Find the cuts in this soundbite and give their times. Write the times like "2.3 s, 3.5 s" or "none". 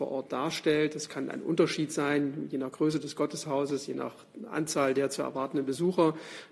none